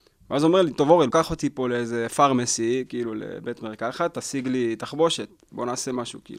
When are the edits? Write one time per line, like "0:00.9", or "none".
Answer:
0:01.1